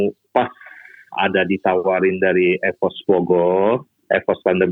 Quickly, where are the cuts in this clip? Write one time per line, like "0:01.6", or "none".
0:01.1